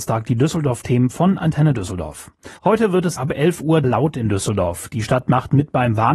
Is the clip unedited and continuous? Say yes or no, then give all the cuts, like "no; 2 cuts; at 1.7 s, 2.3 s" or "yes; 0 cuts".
no; 3 cuts; at 2.6 s, 3.2 s, 3.8 s